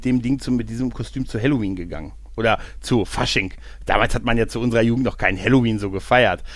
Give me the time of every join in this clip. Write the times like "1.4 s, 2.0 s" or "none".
none